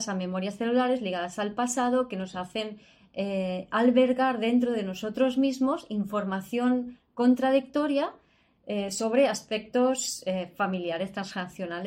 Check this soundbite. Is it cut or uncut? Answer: uncut